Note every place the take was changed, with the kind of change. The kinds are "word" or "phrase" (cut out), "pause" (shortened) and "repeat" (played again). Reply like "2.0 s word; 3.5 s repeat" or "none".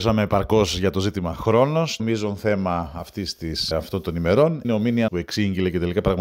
2.0 s phrase; 3.7 s word; 4.6 s word; 5.1 s word